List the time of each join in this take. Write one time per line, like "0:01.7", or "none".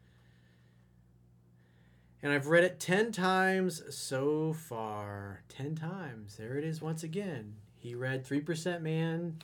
none